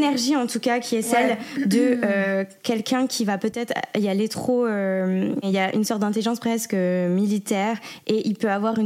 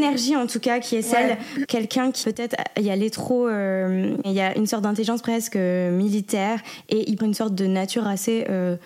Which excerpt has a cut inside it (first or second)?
second